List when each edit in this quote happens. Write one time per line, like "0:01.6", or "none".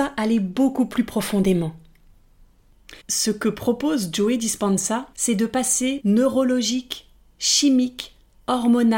0:03.0
0:05.1
0:06.0